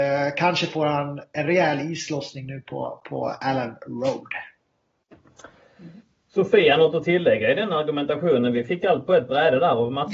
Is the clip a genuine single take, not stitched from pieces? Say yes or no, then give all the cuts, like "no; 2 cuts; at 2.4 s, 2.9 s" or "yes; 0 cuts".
yes; 0 cuts